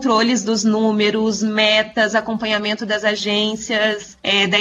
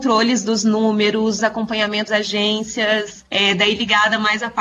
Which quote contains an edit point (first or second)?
second